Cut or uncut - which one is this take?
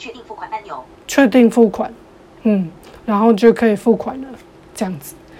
uncut